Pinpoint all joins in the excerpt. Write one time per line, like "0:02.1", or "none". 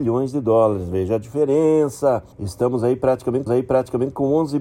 0:03.5